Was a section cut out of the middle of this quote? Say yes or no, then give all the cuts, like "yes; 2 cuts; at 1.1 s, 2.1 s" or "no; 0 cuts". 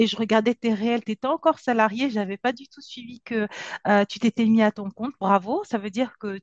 no; 0 cuts